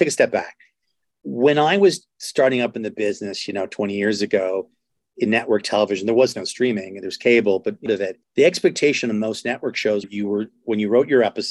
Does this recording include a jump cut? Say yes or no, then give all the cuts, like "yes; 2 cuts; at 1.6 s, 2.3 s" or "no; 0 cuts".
yes; 3 cuts; at 7.9 s, 8.2 s, 10.0 s